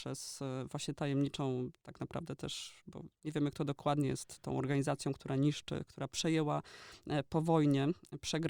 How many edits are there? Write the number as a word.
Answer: zero